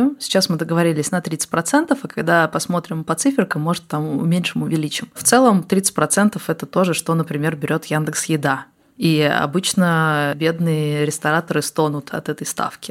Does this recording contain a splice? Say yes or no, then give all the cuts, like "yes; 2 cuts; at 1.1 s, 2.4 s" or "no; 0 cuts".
no; 0 cuts